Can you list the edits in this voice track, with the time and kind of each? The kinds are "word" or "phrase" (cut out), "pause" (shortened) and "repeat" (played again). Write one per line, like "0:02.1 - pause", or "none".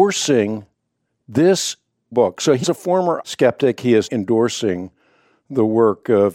0:02.1 - word
0:02.6 - word
0:03.2 - word
0:04.1 - word